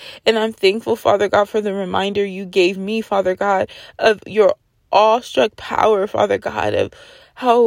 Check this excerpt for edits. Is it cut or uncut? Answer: uncut